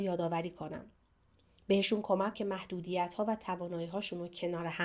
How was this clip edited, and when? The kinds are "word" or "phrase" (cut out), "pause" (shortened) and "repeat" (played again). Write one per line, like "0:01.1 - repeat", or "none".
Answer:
0:02.3 - word